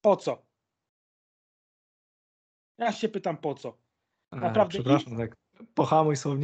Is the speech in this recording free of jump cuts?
yes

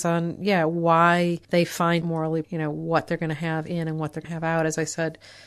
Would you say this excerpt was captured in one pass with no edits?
no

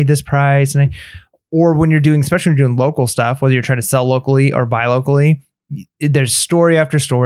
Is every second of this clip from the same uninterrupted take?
yes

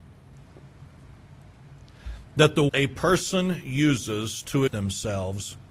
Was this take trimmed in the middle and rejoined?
yes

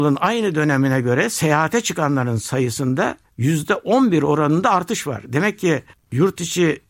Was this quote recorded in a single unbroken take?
yes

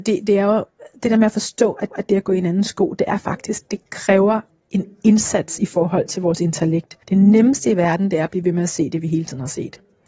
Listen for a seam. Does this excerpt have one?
yes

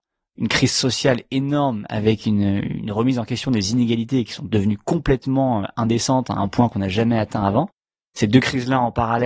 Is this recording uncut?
yes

